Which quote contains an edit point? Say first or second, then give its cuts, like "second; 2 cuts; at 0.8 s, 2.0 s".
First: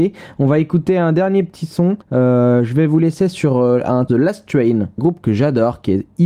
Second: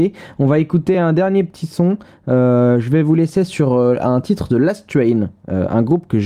first; 3 cuts; at 2.0 s, 4.1 s, 5.0 s